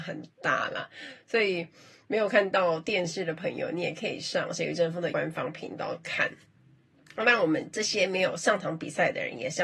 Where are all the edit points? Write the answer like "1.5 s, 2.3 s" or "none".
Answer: 5.1 s

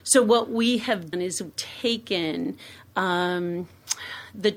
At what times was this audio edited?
1.1 s, 1.5 s

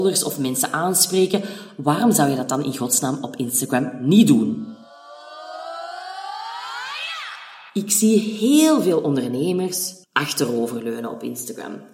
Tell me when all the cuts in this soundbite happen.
7.7 s, 10.0 s

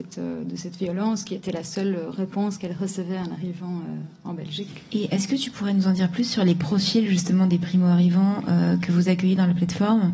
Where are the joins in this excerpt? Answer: none

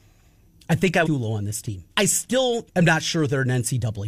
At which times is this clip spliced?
1.1 s, 1.9 s, 2.7 s

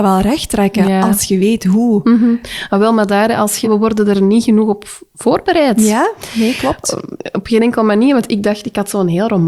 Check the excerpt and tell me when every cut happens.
3.6 s

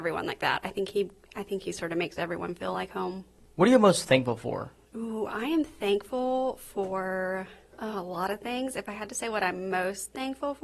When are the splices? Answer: none

